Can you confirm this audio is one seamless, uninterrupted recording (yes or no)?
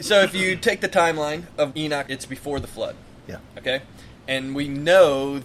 no